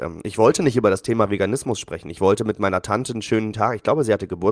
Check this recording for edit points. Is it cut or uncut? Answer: uncut